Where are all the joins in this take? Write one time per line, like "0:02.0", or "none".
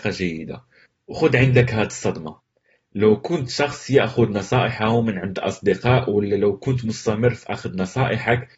none